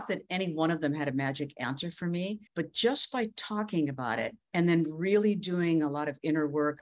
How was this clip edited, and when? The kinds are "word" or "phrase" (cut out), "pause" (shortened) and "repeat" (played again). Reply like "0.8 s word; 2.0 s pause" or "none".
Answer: 2.5 s pause; 4.4 s pause